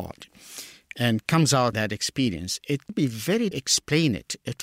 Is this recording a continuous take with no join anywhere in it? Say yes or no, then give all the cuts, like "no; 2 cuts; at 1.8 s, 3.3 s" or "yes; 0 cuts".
no; 3 cuts; at 1.7 s, 2.9 s, 3.5 s